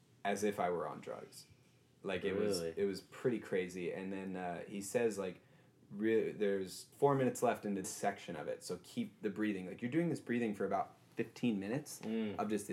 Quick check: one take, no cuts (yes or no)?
no